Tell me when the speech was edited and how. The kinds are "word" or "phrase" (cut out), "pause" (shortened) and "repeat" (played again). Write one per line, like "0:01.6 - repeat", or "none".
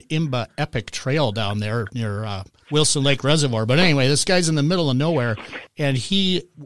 0:02.6 - pause